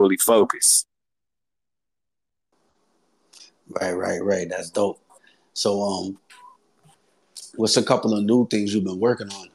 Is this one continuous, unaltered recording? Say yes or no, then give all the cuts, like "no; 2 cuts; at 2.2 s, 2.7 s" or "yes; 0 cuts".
yes; 0 cuts